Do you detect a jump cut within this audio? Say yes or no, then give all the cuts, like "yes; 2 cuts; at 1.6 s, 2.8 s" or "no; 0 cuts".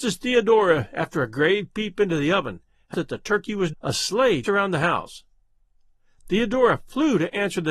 yes; 3 cuts; at 2.9 s, 3.7 s, 4.4 s